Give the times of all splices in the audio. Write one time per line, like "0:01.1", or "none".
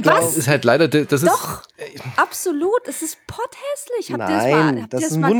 none